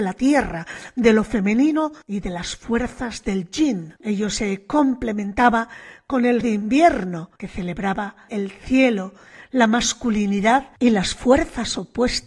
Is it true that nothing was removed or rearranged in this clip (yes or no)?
no